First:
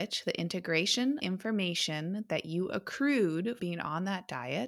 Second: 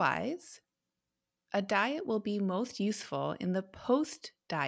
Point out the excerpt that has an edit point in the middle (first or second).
first